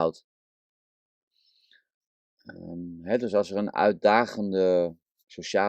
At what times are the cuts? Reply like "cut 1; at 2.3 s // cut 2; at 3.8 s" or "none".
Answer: none